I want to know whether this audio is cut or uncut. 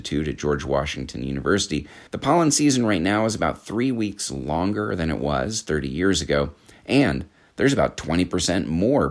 cut